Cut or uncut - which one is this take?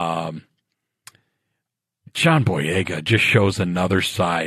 uncut